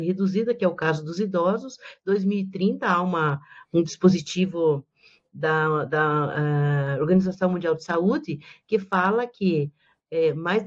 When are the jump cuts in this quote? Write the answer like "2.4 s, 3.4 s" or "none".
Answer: none